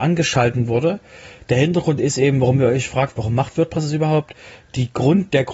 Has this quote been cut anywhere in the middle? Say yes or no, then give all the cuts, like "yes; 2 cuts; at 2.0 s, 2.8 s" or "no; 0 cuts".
no; 0 cuts